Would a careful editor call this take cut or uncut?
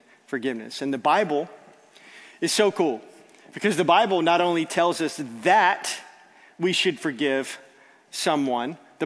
uncut